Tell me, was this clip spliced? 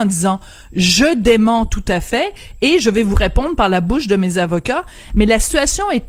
no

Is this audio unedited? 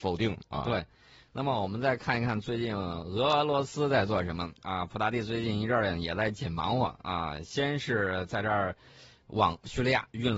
yes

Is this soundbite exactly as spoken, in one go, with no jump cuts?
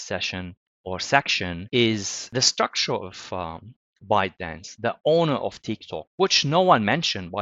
yes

